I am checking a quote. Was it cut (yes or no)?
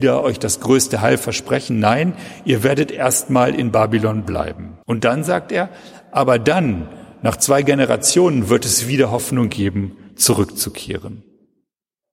yes